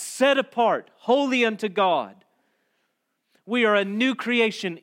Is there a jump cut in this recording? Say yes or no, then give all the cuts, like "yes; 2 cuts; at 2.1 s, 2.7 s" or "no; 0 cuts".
no; 0 cuts